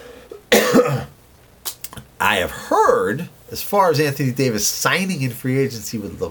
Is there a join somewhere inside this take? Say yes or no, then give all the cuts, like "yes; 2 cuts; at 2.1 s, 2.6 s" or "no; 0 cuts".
no; 0 cuts